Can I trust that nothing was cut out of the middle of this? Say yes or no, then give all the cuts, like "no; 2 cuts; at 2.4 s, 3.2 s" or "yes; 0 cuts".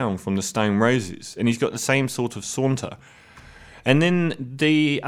yes; 0 cuts